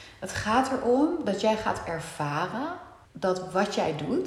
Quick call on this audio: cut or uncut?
cut